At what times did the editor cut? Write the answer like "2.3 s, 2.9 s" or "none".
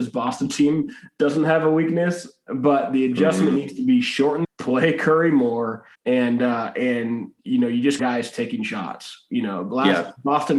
4.4 s, 5.9 s, 7.4 s, 8.0 s